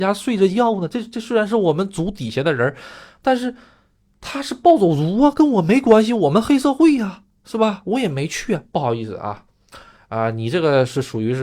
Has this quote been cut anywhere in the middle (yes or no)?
no